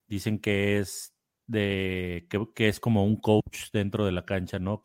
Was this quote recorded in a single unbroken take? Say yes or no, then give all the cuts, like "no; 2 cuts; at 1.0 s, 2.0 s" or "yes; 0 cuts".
yes; 0 cuts